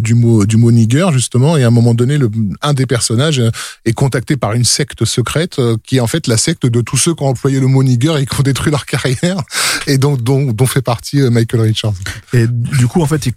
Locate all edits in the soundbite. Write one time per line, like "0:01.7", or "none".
none